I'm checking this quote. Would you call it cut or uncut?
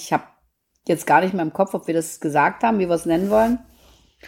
uncut